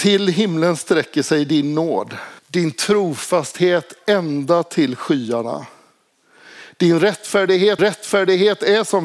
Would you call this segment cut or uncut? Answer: cut